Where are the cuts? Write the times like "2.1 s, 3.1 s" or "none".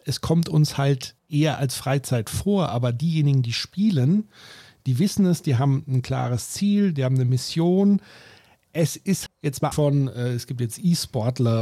1.2 s, 9.3 s, 9.7 s